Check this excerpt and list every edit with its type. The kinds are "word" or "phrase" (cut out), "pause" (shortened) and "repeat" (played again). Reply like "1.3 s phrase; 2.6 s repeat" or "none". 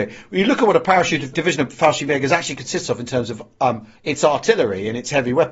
4.0 s pause